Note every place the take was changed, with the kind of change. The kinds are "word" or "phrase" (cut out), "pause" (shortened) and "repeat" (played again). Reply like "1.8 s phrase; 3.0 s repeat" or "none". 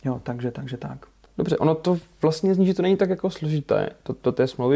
1.3 s pause